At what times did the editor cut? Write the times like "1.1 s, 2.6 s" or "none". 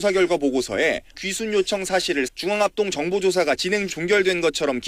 1.1 s, 2.3 s, 3.9 s